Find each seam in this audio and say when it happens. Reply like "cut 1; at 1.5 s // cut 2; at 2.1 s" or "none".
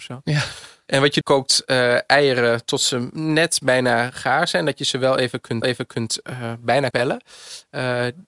cut 1; at 1.2 s // cut 2; at 5.6 s // cut 3; at 6.9 s